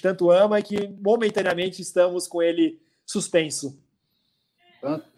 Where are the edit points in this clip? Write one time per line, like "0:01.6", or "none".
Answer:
none